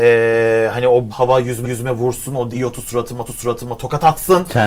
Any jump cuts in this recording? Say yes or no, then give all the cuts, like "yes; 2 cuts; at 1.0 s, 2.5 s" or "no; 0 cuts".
yes; 4 cuts; at 1.1 s, 1.6 s, 2.5 s, 3.3 s